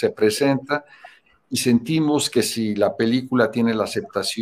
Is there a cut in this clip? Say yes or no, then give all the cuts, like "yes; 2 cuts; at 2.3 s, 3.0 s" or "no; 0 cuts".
no; 0 cuts